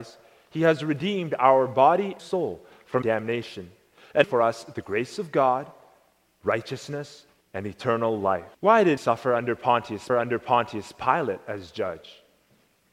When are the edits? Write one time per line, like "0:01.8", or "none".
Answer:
0:02.2
0:03.0
0:04.2
0:07.4
0:08.5
0:09.0
0:10.1